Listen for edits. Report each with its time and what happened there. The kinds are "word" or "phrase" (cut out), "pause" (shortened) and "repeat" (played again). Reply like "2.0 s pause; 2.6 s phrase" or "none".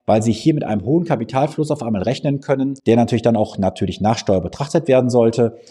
2.8 s pause